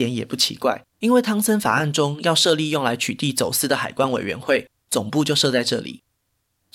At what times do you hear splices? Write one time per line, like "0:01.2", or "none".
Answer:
0:00.9

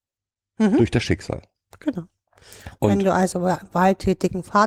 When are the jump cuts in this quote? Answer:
0:03.3

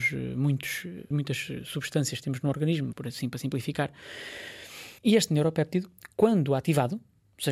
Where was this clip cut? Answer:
0:01.1
0:02.9
0:05.0

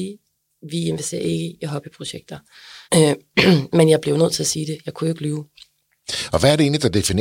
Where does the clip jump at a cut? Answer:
0:02.8

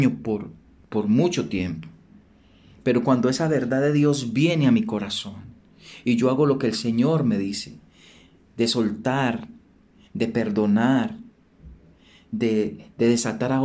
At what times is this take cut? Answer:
none

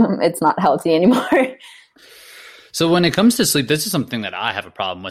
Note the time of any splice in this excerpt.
none

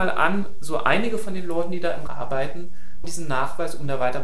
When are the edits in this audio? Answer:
0:02.1
0:03.0

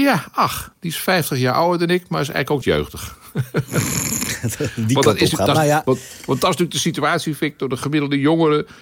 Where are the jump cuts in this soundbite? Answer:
0:02.6

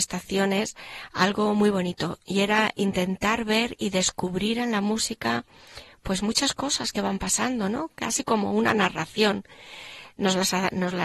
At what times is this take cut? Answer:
none

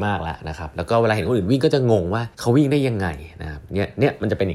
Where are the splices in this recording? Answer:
0:02.3

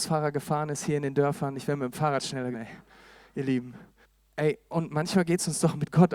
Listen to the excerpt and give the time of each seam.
0:02.5
0:04.0

